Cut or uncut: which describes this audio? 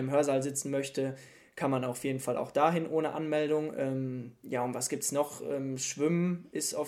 uncut